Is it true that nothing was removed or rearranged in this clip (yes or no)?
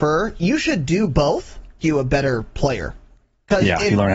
no